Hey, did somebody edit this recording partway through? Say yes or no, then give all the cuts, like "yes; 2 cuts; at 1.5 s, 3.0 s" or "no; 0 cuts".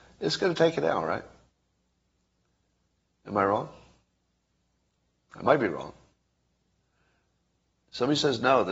no; 0 cuts